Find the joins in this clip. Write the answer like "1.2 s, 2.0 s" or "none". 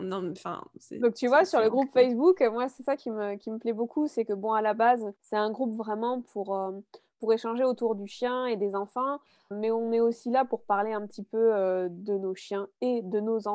5.2 s, 9.5 s